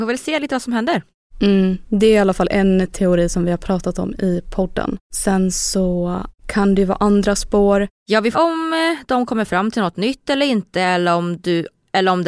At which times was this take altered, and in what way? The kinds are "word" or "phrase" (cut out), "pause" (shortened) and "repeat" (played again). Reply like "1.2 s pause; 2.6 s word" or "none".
5.0 s pause; 6.4 s pause; 8.3 s phrase